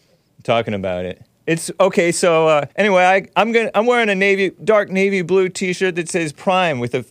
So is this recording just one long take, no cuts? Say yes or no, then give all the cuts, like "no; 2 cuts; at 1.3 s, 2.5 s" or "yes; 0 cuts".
no; 1 cut; at 2.7 s